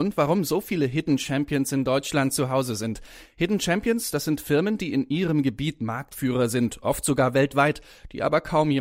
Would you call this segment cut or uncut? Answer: uncut